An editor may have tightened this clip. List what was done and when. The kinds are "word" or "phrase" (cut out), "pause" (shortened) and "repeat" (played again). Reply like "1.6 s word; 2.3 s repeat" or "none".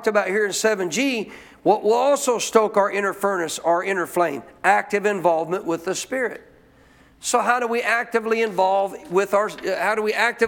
none